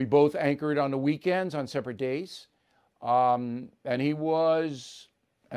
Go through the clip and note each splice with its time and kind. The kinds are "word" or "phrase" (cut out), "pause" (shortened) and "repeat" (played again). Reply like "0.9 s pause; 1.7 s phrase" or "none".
none